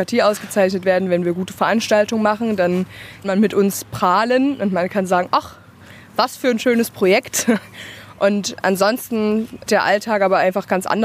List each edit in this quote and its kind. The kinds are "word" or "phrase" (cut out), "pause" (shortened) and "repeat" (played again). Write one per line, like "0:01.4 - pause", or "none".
0:03.2 - word
0:09.7 - word